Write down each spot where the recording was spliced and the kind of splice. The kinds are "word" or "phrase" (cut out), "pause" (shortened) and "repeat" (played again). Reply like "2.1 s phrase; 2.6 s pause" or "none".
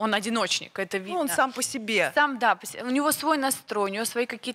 none